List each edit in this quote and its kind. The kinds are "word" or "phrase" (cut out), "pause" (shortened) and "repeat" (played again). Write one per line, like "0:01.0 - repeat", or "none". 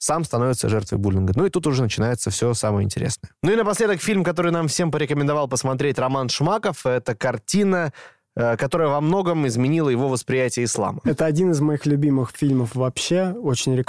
0:03.4 - pause